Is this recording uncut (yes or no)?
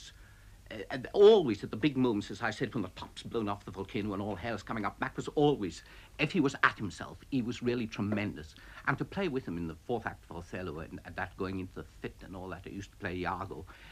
yes